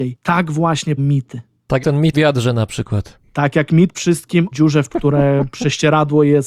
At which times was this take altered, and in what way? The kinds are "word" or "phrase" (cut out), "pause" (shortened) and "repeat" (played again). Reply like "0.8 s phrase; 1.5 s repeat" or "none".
1.0 s word; 1.8 s word; 2.1 s word; 3.9 s word; 4.5 s word; 4.9 s word